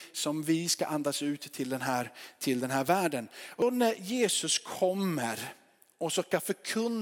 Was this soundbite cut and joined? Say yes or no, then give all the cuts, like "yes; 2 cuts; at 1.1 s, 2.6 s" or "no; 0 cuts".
no; 0 cuts